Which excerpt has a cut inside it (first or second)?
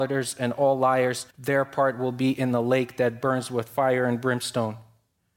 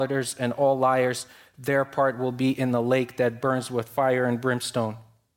first